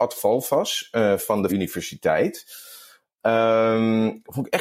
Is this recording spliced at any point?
yes; 1 cut; at 1.5 s

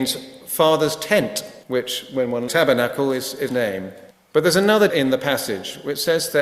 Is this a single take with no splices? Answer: no; 5 cuts; at 1.6 s, 2.5 s, 3.5 s, 4.1 s, 4.9 s

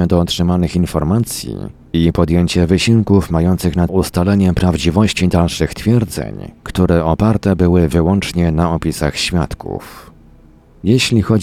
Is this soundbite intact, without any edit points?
no; 1 cut; at 3.9 s

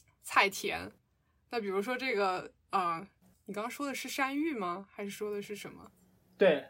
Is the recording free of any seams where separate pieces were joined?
yes; 0 cuts

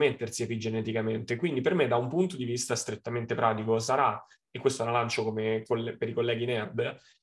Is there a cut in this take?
no; 0 cuts

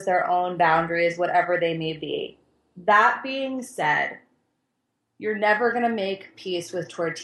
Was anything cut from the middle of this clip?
no; 0 cuts

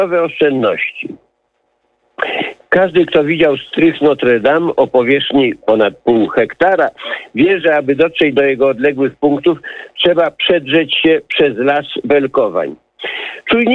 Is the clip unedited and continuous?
yes; 0 cuts

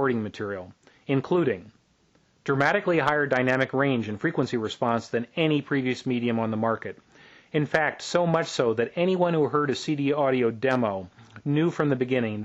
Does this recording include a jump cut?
no; 0 cuts

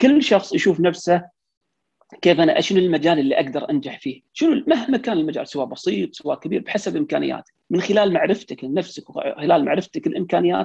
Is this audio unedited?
no; 2 cuts; at 4.3 s, 7.6 s

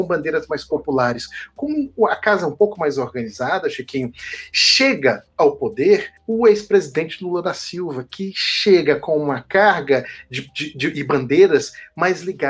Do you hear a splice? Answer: no; 0 cuts

